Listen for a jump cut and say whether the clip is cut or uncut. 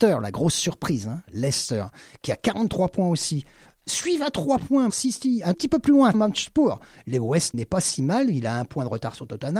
cut